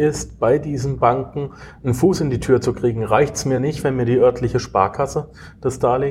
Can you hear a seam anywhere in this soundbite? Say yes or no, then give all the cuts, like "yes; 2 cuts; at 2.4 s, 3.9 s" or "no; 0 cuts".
no; 0 cuts